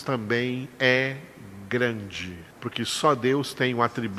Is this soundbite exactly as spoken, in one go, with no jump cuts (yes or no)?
no